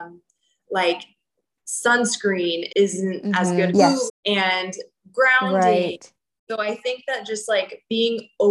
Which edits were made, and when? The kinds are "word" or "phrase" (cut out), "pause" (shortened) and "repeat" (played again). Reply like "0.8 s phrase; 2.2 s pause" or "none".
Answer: 2.7 s word; 3.7 s phrase; 4.1 s word